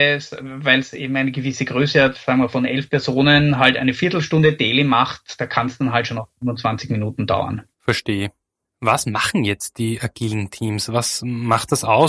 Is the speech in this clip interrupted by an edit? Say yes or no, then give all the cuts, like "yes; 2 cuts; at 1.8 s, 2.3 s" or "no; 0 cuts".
yes; 1 cut; at 7.7 s